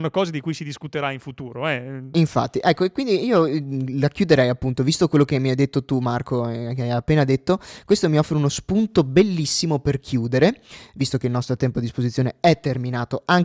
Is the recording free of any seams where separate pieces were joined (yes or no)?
yes